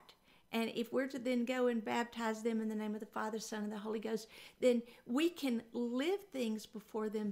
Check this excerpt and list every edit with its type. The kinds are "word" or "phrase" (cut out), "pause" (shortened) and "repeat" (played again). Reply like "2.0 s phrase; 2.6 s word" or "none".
none